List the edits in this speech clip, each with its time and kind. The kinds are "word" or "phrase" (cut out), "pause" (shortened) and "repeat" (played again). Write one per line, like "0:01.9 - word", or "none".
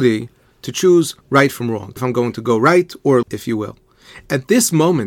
0:01.2 - pause
0:02.0 - word
0:03.2 - word